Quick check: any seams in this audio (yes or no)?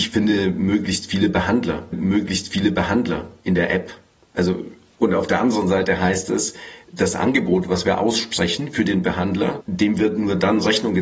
yes